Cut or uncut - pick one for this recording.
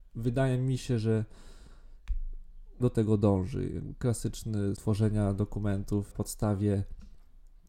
cut